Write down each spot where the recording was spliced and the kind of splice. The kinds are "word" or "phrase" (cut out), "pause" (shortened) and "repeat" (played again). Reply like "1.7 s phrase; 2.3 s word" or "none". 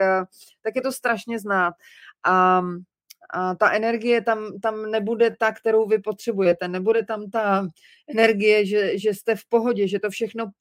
none